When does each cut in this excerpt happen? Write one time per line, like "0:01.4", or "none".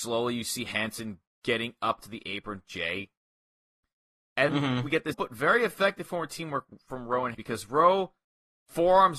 0:02.0
0:02.6
0:04.5
0:05.1
0:07.3